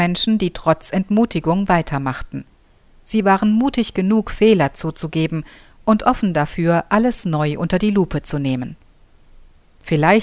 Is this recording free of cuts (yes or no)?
yes